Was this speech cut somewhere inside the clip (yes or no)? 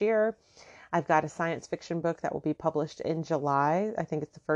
no